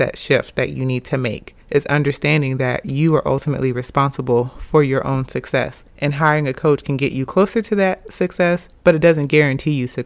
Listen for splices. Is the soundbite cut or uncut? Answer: cut